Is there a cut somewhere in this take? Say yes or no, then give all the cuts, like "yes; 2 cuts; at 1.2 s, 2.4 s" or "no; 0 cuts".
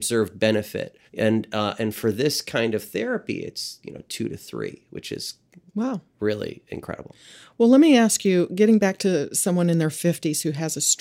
yes; 2 cuts; at 1.1 s, 5.7 s